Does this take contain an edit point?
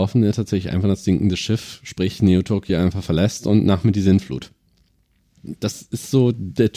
no; 0 cuts

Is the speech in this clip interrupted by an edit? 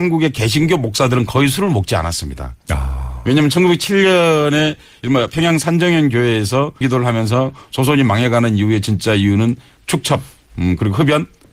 yes; 1 cut; at 6.8 s

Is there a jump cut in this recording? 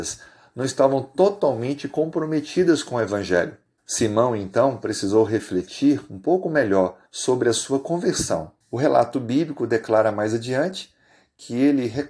yes; 3 cuts; at 3.8 s, 7.1 s, 8.6 s

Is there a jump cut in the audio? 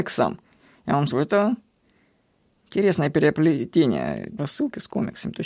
yes; 2 cuts; at 1.1 s, 4.4 s

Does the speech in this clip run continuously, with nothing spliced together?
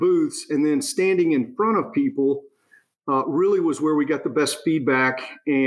yes; 0 cuts

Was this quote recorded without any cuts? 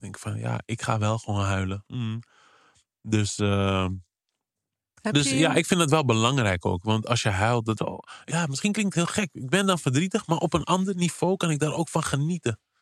no; 1 cut; at 7.8 s

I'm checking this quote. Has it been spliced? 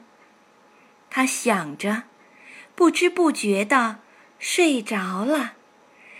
no; 0 cuts

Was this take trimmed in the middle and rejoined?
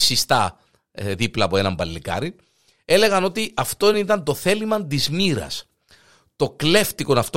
no; 0 cuts

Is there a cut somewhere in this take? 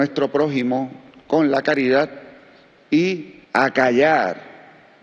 yes; 1 cut; at 3.4 s

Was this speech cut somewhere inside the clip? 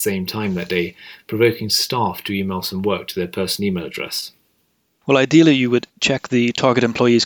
no; 0 cuts

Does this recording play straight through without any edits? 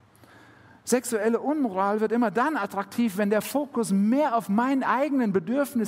yes; 0 cuts

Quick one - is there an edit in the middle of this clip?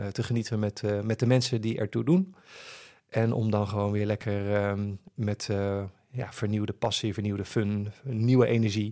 no; 0 cuts

